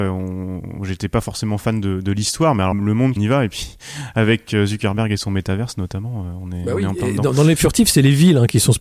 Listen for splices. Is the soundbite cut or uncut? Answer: cut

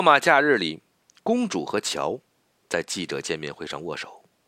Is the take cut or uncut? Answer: uncut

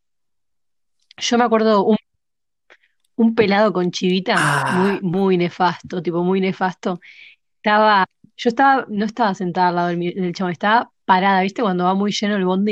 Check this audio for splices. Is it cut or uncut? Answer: uncut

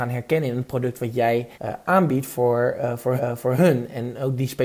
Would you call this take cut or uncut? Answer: cut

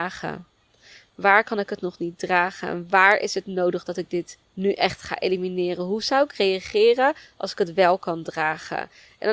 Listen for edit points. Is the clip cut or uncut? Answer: cut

